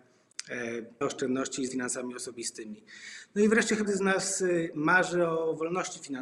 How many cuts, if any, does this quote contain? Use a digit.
3